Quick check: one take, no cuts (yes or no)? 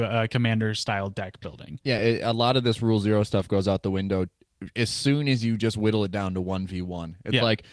yes